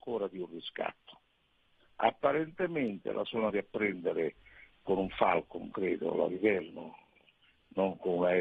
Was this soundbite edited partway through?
yes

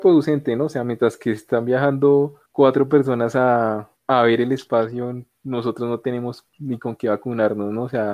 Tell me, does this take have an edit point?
yes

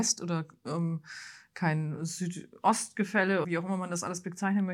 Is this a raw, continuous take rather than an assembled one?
no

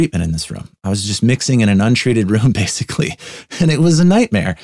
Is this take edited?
no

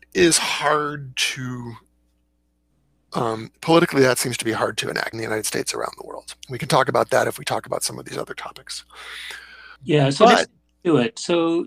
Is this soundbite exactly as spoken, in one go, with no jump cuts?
no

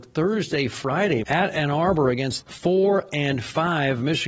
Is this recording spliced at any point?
yes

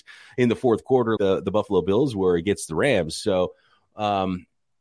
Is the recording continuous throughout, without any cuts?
no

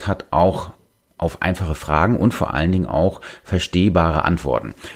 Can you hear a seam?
no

